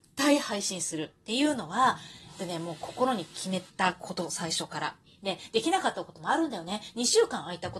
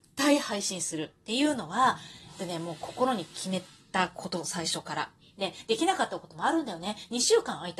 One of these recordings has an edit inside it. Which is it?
first; 1 cut; at 3.7 s

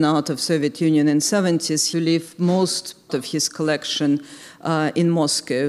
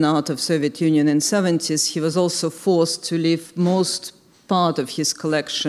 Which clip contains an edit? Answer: first; 2 cuts; at 1.9 s, 3.1 s

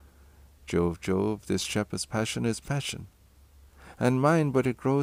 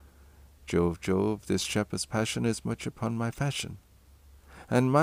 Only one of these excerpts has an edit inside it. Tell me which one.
first; 1 cut; at 2.6 s

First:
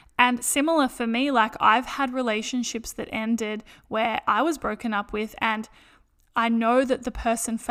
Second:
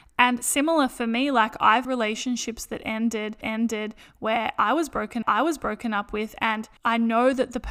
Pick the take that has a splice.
second; 4 cuts; at 1.8 s, 3.4 s, 5.2 s, 6.8 s

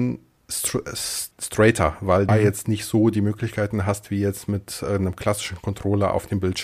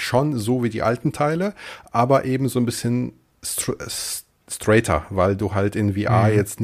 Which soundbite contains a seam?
first; 2 cuts; at 1.3 s, 2.3 s

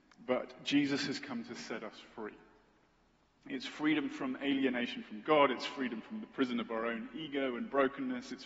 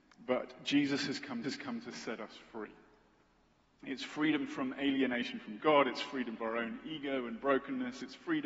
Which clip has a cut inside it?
second; 2 cuts; at 1.4 s, 6.4 s

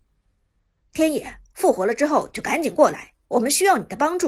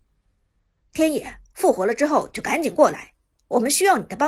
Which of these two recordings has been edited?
first; 1 cut; at 3.2 s

